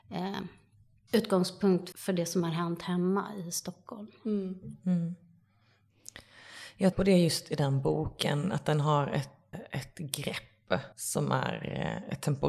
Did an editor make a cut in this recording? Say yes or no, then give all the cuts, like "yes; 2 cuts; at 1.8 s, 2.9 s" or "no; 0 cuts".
yes; 4 cuts; at 1.9 s, 6.9 s, 9.5 s, 10.9 s